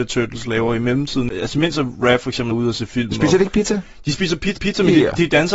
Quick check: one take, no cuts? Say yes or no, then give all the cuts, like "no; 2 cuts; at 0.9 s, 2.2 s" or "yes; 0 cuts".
no; 2 cuts; at 2.5 s, 4.6 s